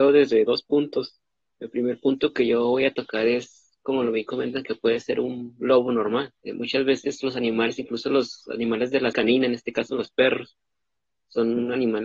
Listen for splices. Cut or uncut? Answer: cut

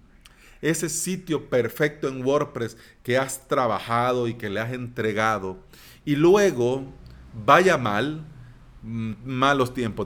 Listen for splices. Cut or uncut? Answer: uncut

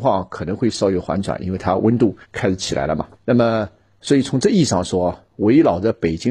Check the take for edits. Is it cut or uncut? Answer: cut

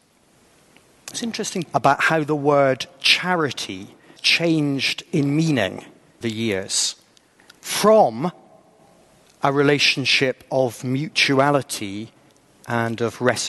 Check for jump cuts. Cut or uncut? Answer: cut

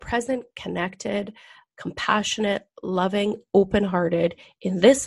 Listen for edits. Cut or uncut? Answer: uncut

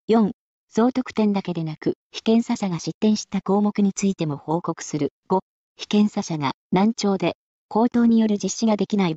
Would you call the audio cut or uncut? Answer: cut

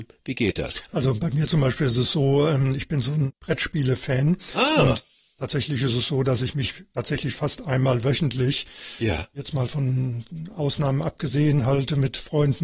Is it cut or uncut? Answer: uncut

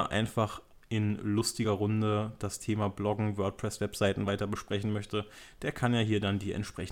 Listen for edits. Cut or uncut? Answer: uncut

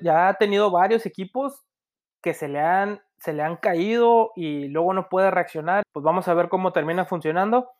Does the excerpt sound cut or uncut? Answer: cut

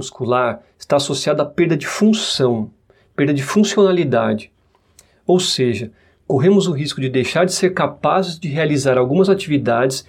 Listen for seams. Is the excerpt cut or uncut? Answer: uncut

